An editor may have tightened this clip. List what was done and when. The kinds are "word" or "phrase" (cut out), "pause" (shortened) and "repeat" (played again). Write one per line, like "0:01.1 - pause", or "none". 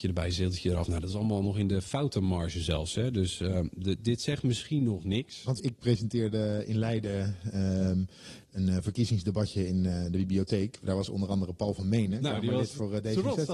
0:05.6 - phrase